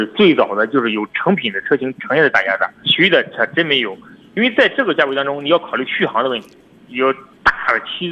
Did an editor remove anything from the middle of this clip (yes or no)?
yes